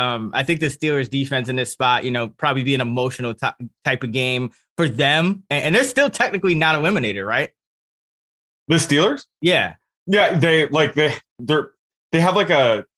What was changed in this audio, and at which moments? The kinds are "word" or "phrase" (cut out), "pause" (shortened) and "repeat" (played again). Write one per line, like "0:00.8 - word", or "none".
none